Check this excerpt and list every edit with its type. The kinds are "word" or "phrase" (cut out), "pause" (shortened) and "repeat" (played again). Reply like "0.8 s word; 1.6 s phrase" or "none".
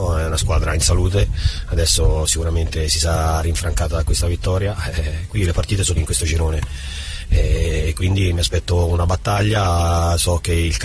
6.0 s phrase